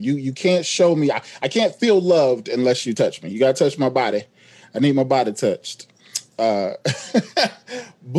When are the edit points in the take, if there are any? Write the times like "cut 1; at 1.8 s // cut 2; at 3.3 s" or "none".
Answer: none